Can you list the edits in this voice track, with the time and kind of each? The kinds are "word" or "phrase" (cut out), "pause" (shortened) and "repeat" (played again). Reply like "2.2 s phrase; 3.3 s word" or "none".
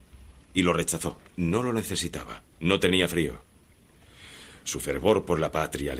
1.3 s pause; 2.5 s pause